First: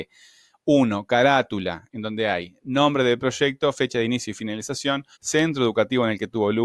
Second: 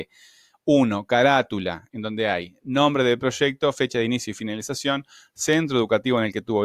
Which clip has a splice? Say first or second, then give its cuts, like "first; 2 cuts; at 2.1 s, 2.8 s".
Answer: first; 1 cut; at 5.1 s